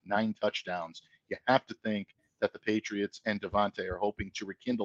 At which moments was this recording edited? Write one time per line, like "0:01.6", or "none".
0:02.2

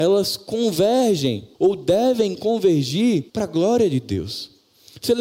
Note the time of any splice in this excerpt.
0:01.5
0:03.3

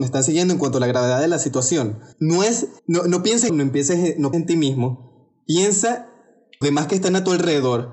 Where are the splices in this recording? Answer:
0:02.1
0:02.8
0:03.5
0:04.3
0:06.6

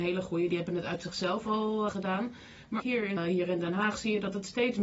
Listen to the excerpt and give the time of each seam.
0:01.9
0:02.8
0:03.2

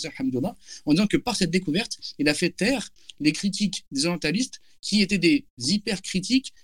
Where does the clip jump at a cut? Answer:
none

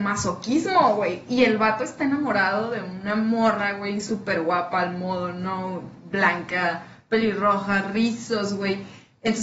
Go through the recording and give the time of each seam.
none

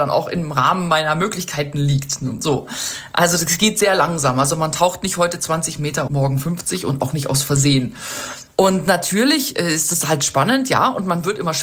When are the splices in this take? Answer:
0:06.1

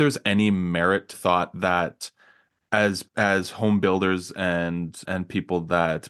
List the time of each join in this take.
0:01.1
0:03.1
0:05.0

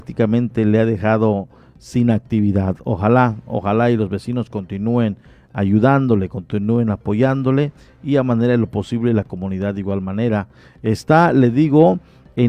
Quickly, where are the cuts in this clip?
none

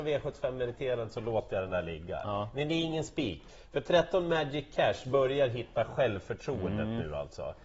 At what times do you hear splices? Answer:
none

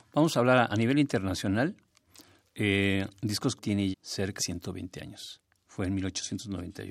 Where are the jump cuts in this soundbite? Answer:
0:03.6
0:03.9
0:04.4

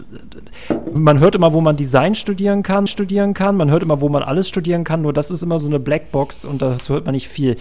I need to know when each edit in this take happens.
0:01.0
0:02.9
0:05.6

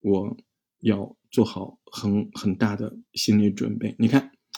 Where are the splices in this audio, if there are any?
0:03.1

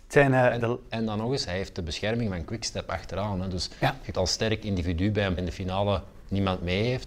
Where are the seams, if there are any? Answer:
0:04.1
0:05.4

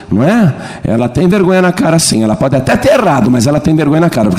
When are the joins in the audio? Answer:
none

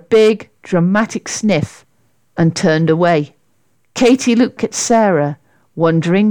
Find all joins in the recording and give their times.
0:04.6

